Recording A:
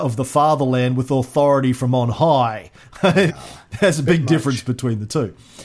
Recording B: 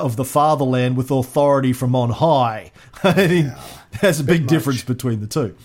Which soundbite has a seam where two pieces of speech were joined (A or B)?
A